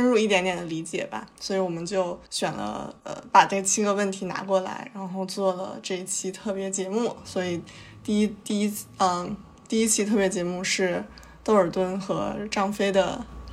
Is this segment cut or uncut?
cut